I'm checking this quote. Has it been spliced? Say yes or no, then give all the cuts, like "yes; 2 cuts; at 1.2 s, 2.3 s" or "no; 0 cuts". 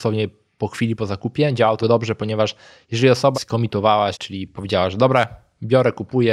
yes; 3 cuts; at 1.8 s, 3.3 s, 4.1 s